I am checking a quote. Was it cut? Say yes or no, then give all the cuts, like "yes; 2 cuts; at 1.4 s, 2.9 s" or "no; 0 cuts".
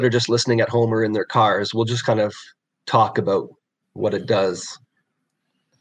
no; 0 cuts